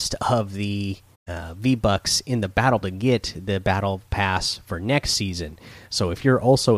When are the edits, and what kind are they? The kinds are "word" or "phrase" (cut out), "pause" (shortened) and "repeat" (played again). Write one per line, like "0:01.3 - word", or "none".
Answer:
0:01.1 - pause
0:02.8 - phrase